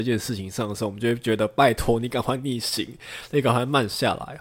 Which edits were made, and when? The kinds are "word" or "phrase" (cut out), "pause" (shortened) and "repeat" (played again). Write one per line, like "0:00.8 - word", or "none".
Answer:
none